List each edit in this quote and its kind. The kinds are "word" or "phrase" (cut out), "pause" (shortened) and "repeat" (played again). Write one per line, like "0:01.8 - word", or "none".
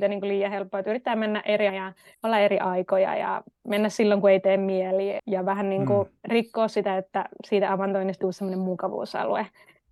0:01.7 - word
0:02.1 - pause
0:05.2 - word
0:06.2 - pause
0:08.2 - word